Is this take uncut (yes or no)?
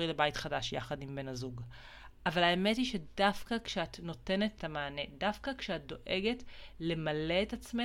no